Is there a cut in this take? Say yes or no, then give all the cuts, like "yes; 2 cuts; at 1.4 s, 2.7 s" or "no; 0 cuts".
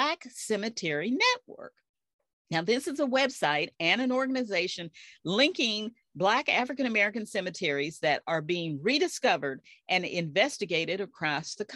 no; 0 cuts